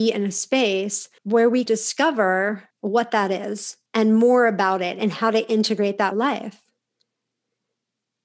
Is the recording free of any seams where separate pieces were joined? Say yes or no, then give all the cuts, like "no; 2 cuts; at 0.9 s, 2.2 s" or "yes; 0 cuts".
no; 5 cuts; at 1.2 s, 1.7 s, 2.7 s, 3.9 s, 6.1 s